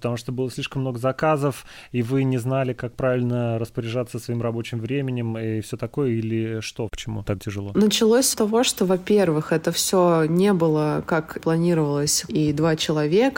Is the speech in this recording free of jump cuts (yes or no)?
no